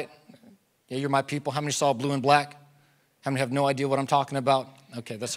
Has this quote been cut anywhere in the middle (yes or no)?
no